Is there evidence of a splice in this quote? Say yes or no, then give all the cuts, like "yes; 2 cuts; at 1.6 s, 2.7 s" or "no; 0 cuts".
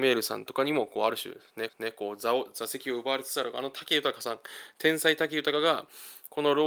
yes; 1 cut; at 1.7 s